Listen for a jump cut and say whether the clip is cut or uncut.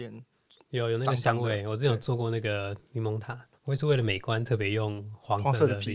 cut